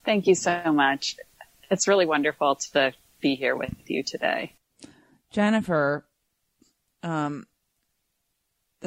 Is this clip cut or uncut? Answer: uncut